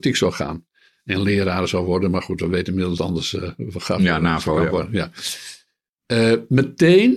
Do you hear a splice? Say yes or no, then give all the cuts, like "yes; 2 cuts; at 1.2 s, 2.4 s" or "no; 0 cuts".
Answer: yes; 1 cut; at 3.0 s